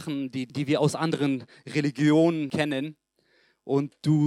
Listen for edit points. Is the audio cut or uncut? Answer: uncut